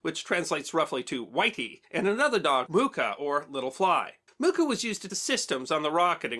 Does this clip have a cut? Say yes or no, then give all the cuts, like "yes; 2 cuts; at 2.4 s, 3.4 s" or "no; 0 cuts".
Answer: yes; 4 cuts; at 1.8 s, 2.7 s, 4.3 s, 5.1 s